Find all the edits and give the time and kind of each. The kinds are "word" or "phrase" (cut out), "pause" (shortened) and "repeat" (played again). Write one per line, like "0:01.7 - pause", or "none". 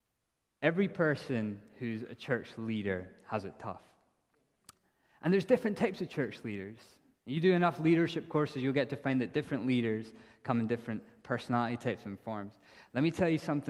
none